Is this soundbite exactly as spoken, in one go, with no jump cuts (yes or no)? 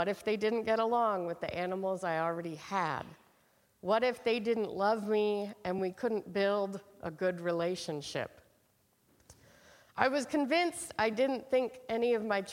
yes